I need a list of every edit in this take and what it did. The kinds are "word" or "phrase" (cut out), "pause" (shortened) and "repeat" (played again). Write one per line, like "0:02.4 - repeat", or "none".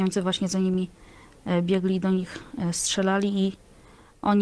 none